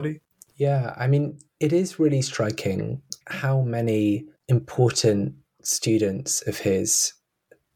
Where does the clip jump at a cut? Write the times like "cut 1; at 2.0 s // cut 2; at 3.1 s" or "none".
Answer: cut 1; at 1.6 s // cut 2; at 3.2 s // cut 3; at 4.4 s